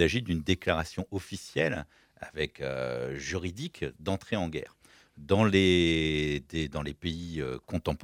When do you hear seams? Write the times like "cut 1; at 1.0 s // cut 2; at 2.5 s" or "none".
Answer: none